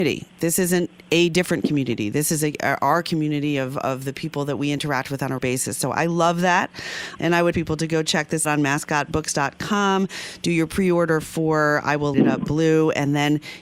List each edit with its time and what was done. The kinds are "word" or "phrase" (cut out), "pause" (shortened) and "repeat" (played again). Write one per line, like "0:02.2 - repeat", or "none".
0:05.4 - word
0:07.2 - word
0:07.5 - word
0:08.4 - word
0:12.1 - word